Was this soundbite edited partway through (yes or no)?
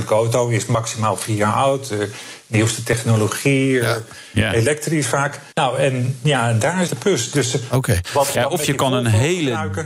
yes